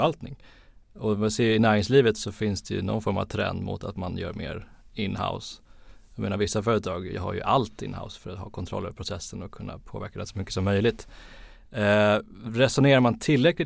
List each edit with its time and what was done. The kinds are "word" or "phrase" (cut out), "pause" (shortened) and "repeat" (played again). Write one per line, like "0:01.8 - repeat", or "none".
none